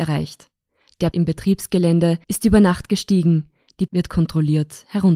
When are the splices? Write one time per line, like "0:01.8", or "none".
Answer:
0:01.1
0:02.2
0:03.9